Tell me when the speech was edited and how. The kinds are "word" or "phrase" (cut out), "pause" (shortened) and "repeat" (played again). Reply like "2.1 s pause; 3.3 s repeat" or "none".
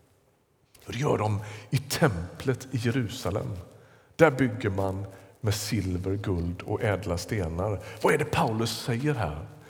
none